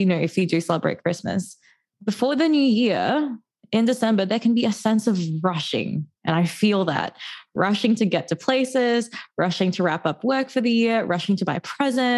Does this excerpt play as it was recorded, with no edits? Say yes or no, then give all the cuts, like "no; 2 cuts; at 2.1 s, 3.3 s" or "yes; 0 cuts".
yes; 0 cuts